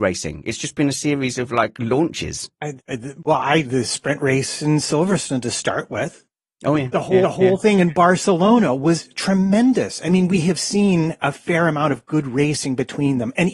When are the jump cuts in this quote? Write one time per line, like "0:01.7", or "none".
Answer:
0:02.5
0:03.6
0:07.2